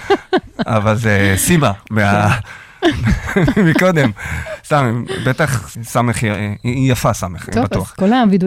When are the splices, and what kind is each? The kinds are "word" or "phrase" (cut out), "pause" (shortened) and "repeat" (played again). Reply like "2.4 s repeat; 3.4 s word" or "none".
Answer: 5.7 s word